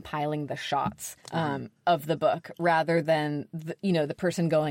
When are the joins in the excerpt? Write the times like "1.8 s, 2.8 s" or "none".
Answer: 1.2 s

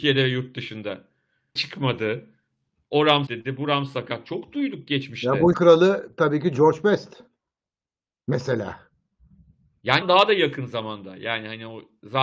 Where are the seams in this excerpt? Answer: 1.6 s, 3.3 s, 5.5 s, 10.0 s

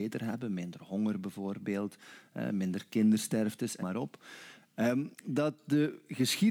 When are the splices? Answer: 3.8 s, 5.1 s

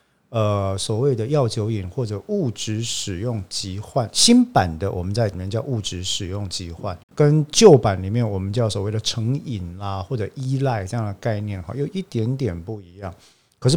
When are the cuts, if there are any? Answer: 5.3 s, 7.0 s

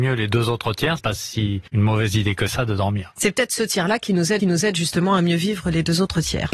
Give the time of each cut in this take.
1.0 s, 1.7 s, 4.4 s

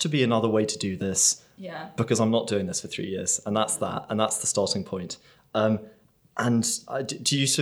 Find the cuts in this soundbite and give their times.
none

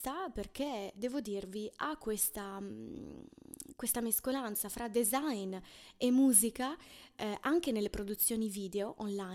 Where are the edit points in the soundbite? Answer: 0.9 s

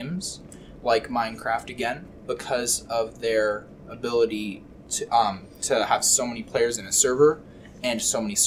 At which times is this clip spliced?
none

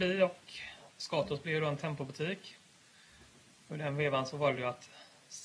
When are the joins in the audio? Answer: none

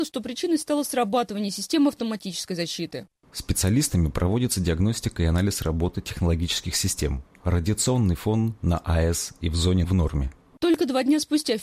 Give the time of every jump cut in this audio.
9.8 s

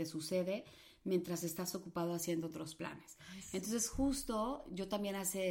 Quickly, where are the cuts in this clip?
none

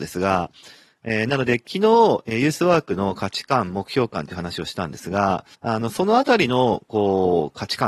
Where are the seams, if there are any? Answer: 5.5 s

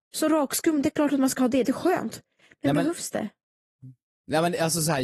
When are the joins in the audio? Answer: 1.6 s

